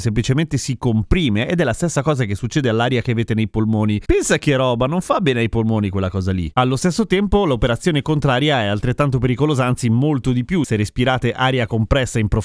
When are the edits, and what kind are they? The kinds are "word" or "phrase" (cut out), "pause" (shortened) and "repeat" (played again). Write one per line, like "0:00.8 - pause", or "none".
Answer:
0:10.6 - word